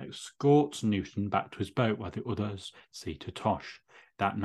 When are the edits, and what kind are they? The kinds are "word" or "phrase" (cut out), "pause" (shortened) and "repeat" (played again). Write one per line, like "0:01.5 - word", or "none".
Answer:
none